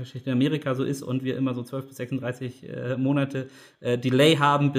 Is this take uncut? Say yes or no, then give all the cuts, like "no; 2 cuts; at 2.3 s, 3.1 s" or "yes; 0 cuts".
yes; 0 cuts